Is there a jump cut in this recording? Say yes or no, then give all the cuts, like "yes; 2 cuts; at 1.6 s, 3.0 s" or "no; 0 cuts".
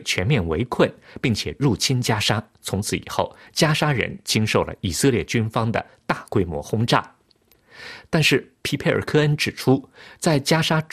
no; 0 cuts